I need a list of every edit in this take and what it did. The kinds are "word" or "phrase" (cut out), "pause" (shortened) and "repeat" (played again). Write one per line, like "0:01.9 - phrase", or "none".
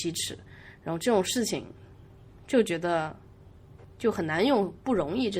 0:03.9 - pause